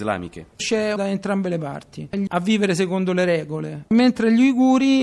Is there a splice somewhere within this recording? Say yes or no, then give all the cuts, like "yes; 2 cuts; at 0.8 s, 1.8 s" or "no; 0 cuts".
yes; 2 cuts; at 1.0 s, 2.3 s